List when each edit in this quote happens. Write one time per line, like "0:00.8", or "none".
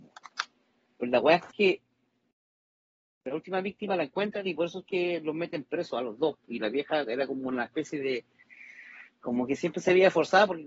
none